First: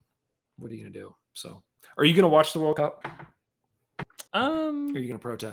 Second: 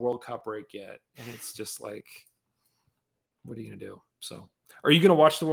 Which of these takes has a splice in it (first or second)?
first